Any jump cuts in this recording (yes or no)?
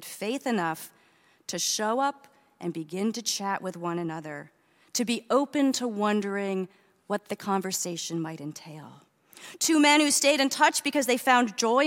no